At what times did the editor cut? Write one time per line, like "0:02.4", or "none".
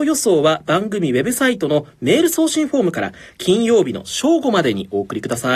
none